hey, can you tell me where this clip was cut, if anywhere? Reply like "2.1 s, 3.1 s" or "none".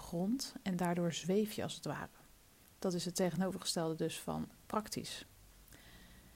none